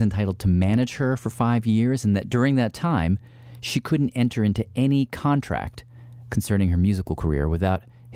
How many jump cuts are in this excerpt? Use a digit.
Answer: 0